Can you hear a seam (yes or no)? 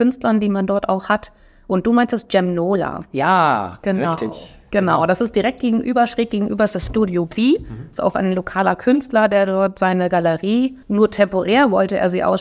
yes